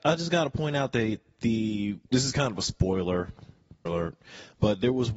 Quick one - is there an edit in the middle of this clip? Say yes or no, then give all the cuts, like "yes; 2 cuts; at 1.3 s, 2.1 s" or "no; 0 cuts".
yes; 2 cuts; at 2.0 s, 3.9 s